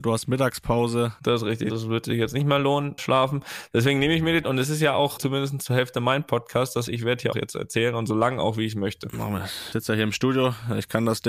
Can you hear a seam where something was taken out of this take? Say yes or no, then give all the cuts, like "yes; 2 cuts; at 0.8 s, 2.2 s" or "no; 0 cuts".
yes; 5 cuts; at 3.0 s, 4.4 s, 6.9 s, 7.3 s, 9.7 s